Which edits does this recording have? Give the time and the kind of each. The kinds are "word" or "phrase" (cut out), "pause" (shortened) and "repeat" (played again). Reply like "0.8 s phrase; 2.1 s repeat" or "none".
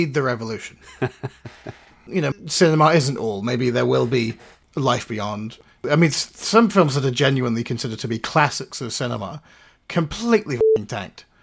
2.3 s word; 5.7 s pause